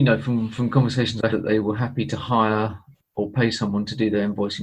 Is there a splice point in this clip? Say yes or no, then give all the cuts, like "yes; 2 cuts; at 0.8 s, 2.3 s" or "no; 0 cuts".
yes; 1 cut; at 1.3 s